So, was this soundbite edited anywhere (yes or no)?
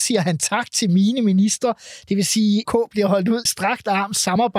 yes